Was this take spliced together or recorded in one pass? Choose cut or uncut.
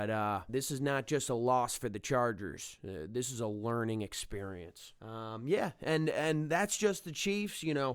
uncut